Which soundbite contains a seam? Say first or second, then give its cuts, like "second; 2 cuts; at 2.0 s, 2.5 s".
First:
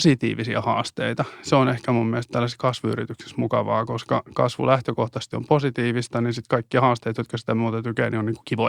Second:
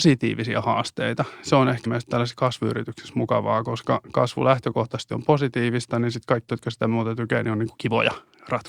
second; 2 cuts; at 1.9 s, 6.5 s